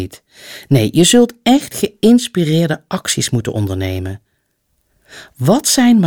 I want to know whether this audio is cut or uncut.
uncut